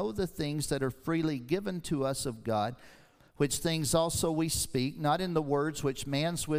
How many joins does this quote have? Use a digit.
0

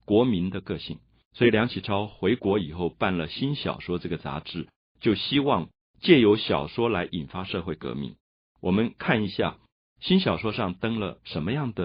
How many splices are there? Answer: 0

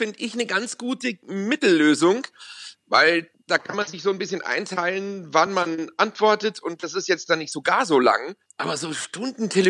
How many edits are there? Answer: 0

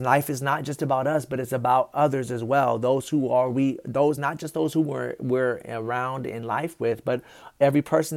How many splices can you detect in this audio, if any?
0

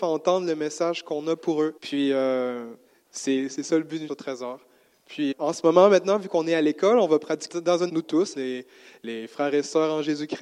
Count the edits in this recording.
7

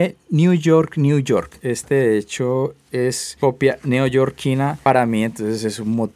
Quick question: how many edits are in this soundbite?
0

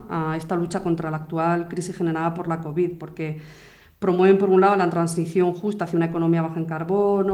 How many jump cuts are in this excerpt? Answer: 0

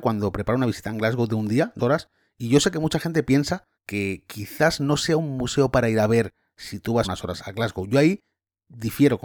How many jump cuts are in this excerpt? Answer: 4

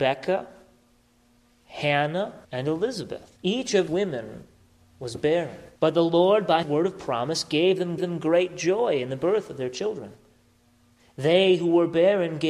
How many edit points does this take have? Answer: 6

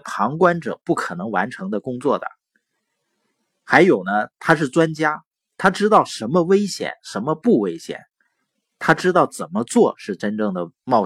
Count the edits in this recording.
0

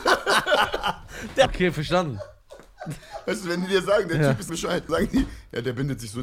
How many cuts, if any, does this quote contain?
3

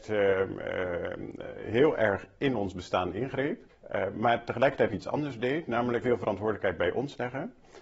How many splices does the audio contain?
3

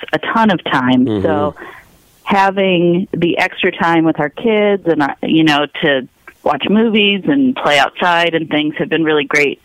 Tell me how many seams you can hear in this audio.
1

